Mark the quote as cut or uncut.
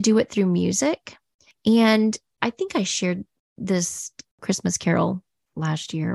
uncut